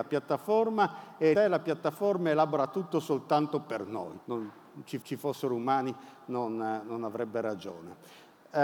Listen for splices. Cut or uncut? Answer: cut